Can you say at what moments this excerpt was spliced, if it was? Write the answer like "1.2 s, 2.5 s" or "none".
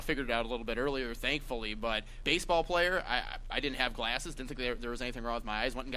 2.2 s